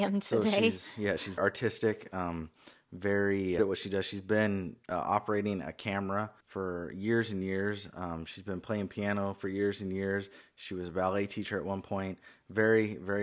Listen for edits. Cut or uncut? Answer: cut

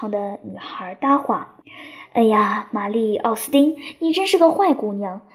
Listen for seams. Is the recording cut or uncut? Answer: cut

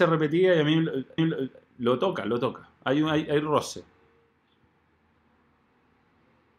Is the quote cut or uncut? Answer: cut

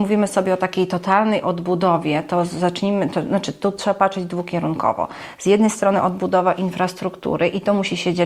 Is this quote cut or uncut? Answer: uncut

